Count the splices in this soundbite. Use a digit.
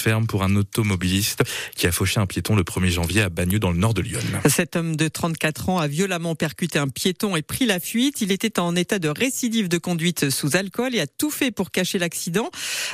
0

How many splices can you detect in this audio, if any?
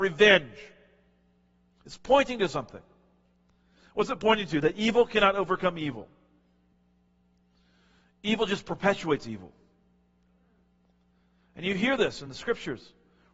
0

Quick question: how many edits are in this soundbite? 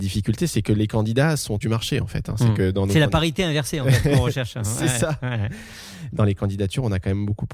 1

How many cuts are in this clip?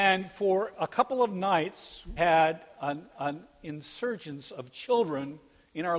2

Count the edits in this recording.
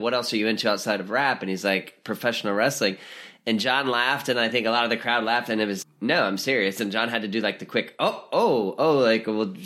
1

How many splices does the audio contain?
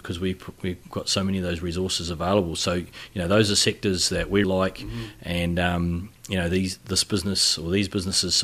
1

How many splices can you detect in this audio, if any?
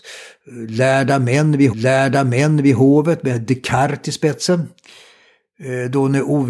1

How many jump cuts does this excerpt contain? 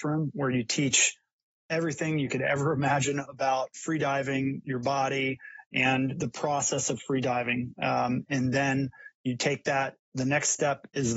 0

